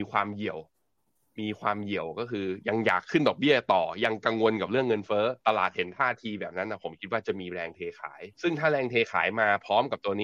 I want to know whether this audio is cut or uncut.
cut